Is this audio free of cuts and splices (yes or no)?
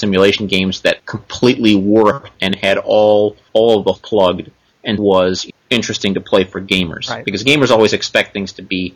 no